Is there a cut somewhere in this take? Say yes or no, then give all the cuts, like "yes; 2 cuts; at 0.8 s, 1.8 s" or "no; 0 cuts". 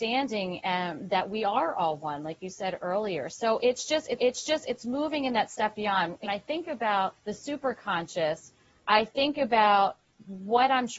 yes; 3 cuts; at 4.2 s, 6.3 s, 7.2 s